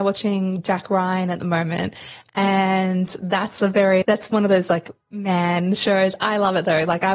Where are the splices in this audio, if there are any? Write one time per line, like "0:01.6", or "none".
0:04.0
0:05.0

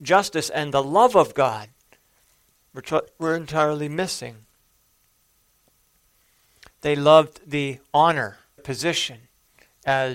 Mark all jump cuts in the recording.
0:08.6

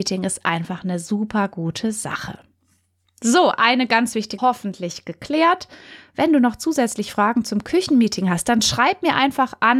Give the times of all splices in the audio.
0:03.5
0:04.4

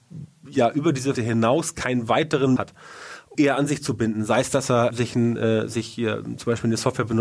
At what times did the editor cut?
0:01.1
0:02.6
0:03.3
0:04.9

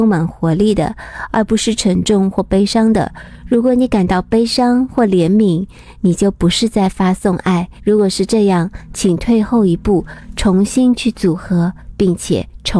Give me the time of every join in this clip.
0:07.8

